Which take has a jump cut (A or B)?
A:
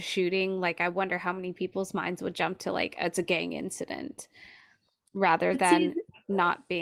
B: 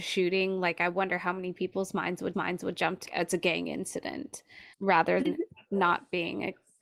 B